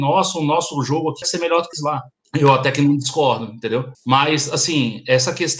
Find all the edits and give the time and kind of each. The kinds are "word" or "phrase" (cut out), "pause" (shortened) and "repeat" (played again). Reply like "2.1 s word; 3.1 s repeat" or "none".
1.2 s word; 1.7 s phrase; 2.1 s pause; 3.9 s pause

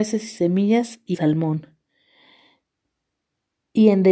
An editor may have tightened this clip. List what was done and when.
1.1 s word

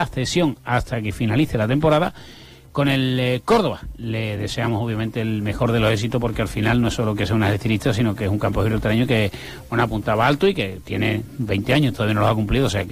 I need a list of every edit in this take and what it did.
none

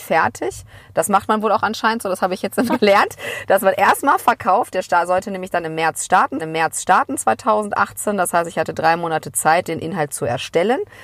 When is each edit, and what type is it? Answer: 2.7 s word; 6.4 s repeat

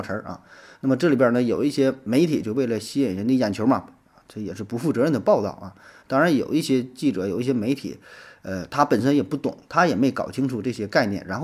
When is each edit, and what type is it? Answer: none

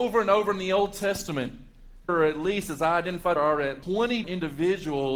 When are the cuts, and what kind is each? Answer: 2.1 s word; 3.4 s phrase; 3.8 s word; 4.2 s word

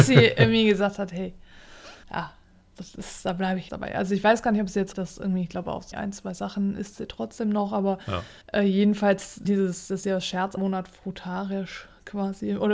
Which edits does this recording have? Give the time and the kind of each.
2.0 s pause; 3.7 s word; 4.9 s word; 5.9 s word; 8.4 s pause; 9.4 s word; 10.6 s word

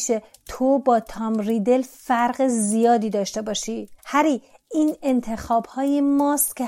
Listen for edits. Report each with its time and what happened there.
4.0 s pause

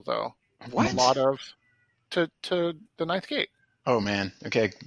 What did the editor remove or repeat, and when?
none

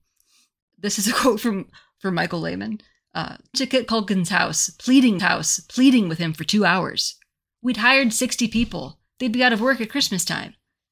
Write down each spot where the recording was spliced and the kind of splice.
3.5 s phrase; 5.2 s repeat

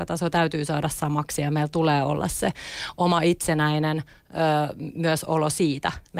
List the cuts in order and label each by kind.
none

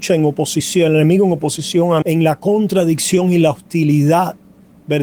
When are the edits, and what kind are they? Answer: 2.0 s word

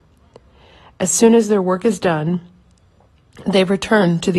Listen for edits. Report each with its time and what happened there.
none

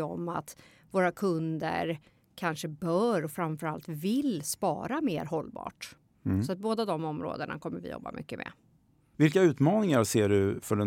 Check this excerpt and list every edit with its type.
none

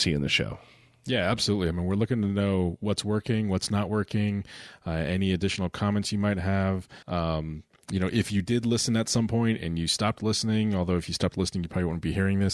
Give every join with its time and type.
7.0 s pause

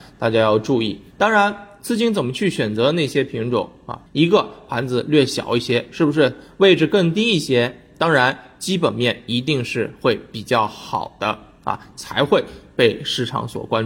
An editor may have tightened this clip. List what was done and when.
1.1 s pause; 4.1 s pause

